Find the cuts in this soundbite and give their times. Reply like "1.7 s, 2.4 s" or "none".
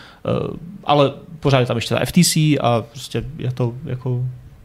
none